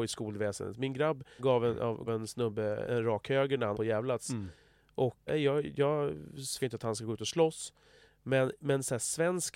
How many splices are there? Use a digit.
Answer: 6